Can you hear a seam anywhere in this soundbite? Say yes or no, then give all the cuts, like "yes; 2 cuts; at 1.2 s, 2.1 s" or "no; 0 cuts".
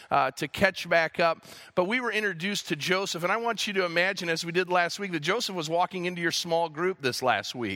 no; 0 cuts